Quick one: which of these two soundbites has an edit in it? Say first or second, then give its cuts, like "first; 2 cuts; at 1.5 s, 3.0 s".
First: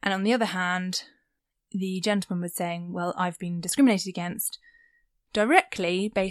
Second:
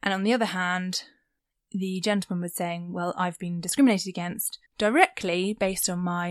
second; 1 cut; at 4.7 s